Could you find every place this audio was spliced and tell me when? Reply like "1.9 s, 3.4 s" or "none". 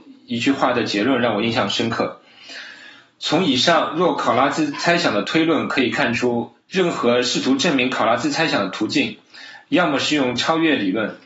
6.6 s